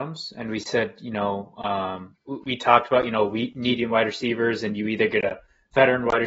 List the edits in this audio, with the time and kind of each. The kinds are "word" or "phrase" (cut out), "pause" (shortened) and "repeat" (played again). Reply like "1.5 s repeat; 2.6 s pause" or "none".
none